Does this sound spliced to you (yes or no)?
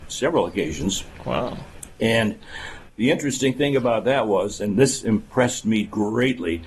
no